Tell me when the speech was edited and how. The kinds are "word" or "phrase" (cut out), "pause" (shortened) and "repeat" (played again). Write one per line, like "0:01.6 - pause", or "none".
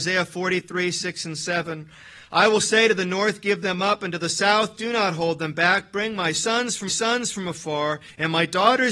0:06.9 - repeat